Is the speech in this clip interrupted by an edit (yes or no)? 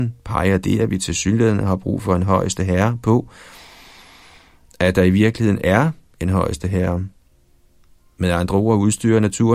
no